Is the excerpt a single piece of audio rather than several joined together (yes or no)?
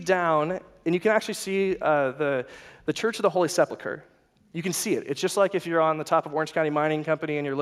yes